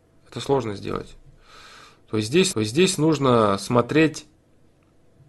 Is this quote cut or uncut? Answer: cut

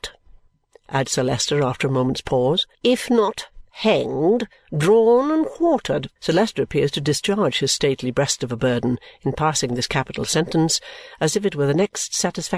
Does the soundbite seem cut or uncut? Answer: cut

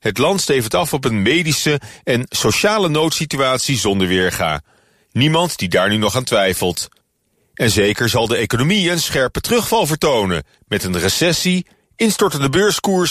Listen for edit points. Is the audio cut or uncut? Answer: uncut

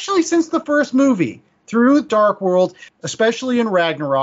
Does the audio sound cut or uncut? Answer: uncut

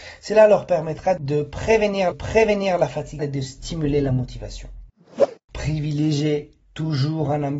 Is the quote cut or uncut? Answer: cut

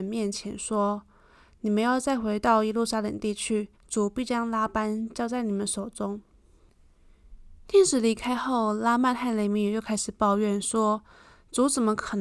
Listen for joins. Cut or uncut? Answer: cut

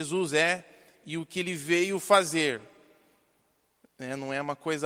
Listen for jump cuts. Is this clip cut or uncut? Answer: uncut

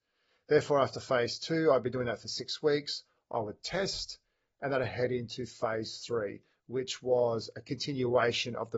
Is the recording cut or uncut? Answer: uncut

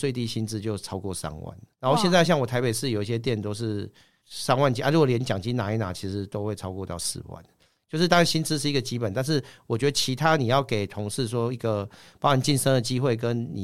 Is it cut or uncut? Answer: cut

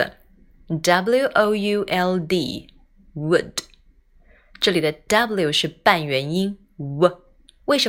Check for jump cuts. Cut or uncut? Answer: uncut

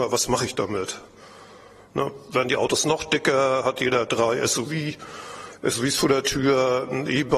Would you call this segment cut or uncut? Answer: uncut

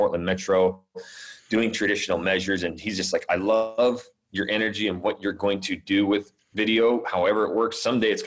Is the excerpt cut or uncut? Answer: uncut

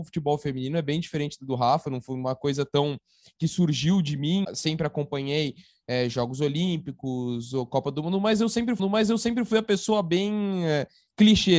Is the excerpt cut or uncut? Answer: cut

